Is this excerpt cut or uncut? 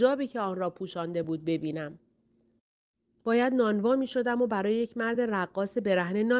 uncut